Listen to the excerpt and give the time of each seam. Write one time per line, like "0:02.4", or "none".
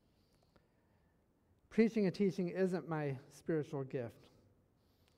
none